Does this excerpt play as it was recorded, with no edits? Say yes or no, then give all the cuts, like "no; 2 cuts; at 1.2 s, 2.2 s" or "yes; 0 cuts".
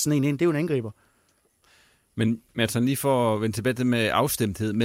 yes; 0 cuts